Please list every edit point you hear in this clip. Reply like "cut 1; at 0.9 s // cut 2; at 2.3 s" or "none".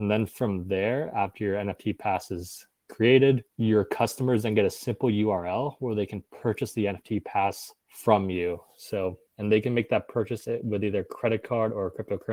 cut 1; at 3.5 s // cut 2; at 7.8 s // cut 3; at 9.3 s